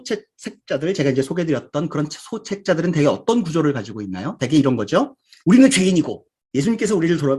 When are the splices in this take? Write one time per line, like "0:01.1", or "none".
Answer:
none